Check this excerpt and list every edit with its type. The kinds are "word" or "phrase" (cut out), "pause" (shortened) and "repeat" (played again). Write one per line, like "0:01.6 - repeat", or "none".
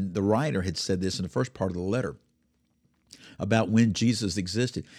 none